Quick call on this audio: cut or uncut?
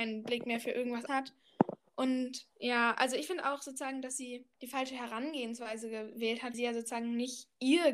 cut